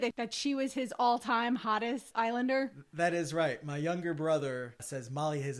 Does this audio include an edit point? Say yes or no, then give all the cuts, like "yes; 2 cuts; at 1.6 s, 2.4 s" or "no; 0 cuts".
no; 0 cuts